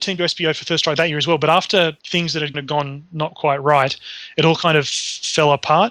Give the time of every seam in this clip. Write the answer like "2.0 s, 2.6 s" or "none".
2.0 s, 2.5 s